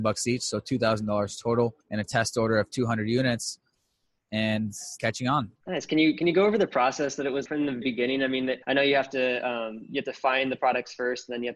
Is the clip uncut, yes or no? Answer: no